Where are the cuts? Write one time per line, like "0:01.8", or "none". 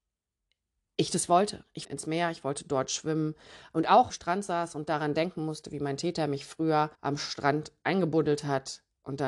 0:01.8
0:04.1
0:06.9